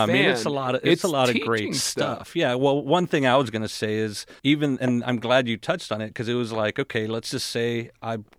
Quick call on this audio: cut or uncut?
cut